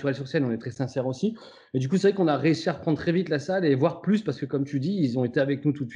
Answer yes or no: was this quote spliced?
no